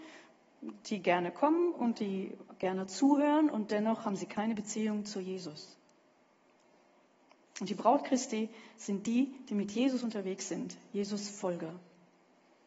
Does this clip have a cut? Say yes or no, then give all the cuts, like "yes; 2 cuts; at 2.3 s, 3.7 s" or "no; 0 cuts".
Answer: no; 0 cuts